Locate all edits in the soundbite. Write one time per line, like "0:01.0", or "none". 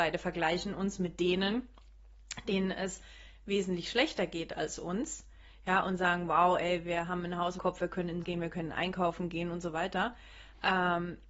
0:07.6
0:08.2